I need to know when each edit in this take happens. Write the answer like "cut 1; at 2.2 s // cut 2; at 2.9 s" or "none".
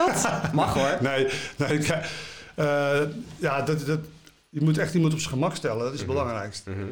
none